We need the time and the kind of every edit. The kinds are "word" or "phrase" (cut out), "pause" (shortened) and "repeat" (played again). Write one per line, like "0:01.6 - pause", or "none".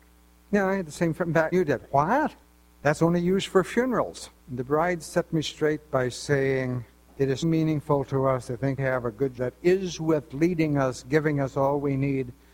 0:01.5 - word
0:02.4 - pause
0:04.4 - pause
0:07.1 - pause
0:07.4 - word
0:08.8 - word
0:09.4 - word
0:10.3 - word

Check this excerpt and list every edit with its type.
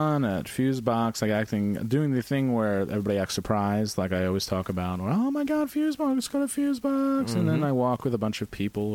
none

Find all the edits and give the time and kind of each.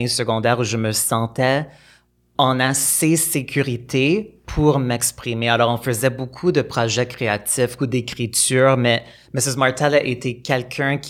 0:07.8 - phrase

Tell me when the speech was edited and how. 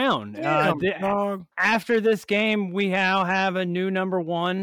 0:01.5 - pause

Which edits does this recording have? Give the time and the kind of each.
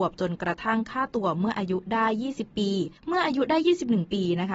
0:03.0 - pause

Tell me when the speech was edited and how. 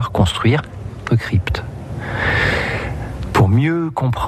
0:01.1 - word

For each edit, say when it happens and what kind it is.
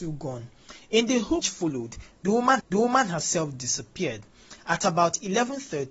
0:01.4 - word
0:02.6 - repeat

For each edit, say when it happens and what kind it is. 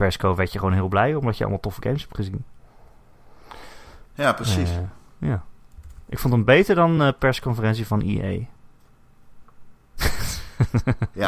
none

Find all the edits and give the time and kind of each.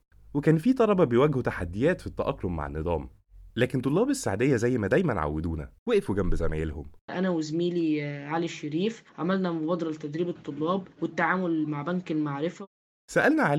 0:03.5 - pause
0:05.8 - pause
0:07.0 - pause
0:09.1 - pause
0:10.9 - pause

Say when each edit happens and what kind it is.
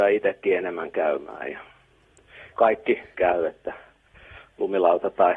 0:02.5 - word
0:03.1 - word

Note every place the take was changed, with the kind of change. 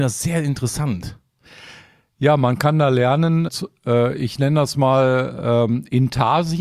0:03.5 - word

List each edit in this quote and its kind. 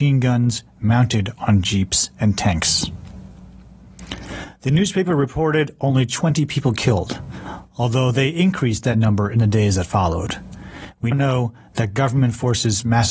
0:11.1 - word

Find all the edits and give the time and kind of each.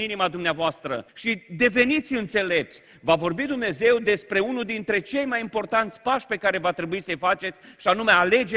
0:01.1 - pause

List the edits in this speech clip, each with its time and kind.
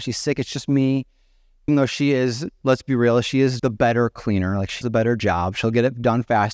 0:01.7 - word
0:03.6 - word
0:04.8 - word

